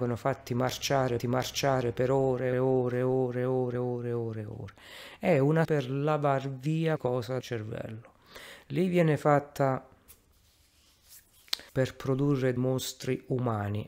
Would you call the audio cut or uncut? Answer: cut